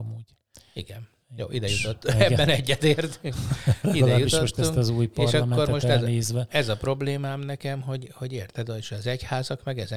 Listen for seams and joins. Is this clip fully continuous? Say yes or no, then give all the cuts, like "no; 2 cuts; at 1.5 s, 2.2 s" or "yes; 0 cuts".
yes; 0 cuts